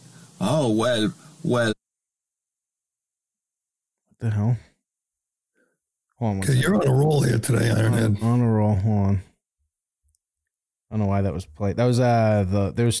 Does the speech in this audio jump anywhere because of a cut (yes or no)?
no